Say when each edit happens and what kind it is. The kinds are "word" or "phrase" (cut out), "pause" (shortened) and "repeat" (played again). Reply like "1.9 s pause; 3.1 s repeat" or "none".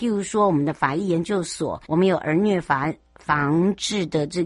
1.8 s pause

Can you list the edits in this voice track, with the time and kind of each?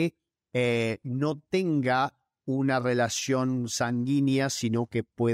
none

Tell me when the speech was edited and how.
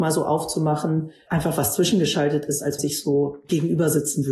1.3 s word; 2.8 s phrase

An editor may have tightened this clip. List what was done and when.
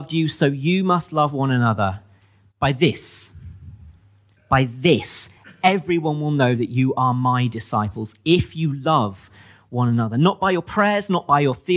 none

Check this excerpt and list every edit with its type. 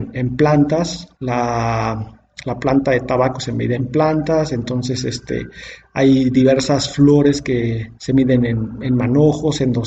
1.1 s pause; 8.0 s pause

